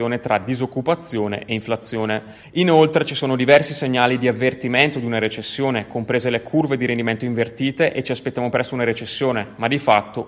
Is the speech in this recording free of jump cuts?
yes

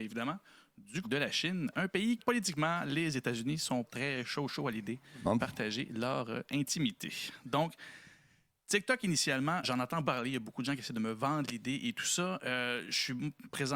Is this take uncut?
no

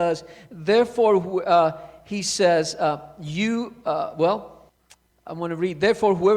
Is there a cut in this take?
no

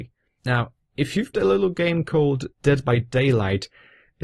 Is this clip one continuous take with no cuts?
no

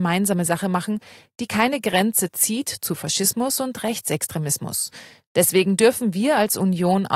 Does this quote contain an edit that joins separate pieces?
no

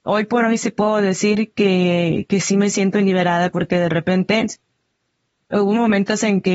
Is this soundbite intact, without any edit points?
yes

